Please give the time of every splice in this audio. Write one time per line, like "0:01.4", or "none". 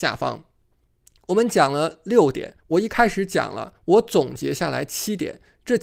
0:02.6
0:03.8